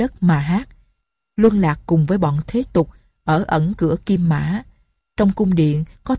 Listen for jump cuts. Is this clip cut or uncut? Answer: uncut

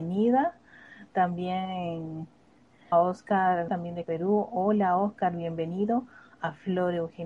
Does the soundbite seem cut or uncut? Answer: cut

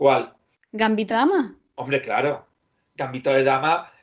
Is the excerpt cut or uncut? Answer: cut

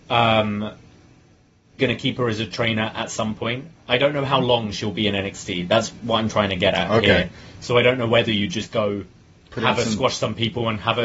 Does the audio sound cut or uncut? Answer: cut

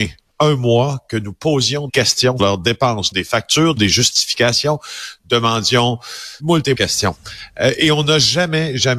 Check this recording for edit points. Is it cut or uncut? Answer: cut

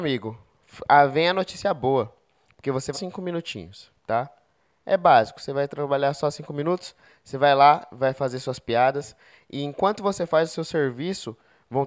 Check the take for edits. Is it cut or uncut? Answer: cut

